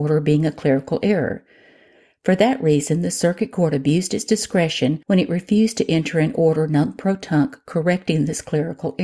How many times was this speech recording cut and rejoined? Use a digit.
1